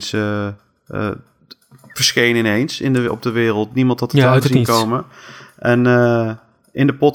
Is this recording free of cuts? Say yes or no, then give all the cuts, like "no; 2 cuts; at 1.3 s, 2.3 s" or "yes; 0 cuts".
yes; 0 cuts